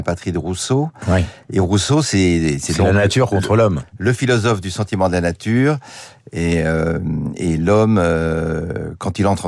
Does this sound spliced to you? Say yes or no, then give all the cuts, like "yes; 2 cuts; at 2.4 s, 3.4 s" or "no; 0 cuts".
no; 0 cuts